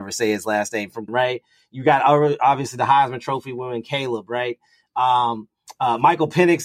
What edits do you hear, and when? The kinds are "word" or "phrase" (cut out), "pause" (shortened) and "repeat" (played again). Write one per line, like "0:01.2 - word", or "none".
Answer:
0:01.1 - word